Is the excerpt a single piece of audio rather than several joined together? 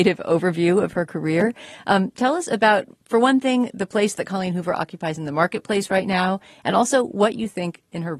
yes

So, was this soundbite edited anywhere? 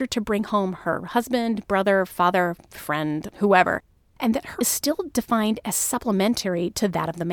yes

